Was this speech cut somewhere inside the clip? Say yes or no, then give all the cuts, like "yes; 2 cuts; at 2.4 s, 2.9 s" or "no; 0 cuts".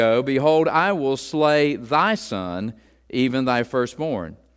no; 0 cuts